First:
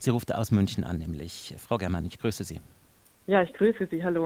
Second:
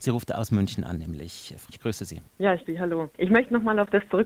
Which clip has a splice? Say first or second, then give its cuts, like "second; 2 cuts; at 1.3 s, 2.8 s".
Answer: second; 4 cuts; at 1.7 s, 2.3 s, 2.6 s, 3.1 s